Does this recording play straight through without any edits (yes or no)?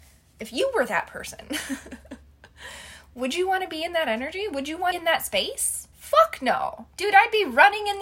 no